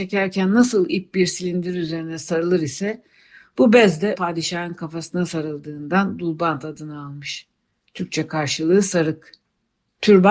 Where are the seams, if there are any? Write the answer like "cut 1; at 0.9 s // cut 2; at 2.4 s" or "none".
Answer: cut 1; at 4.2 s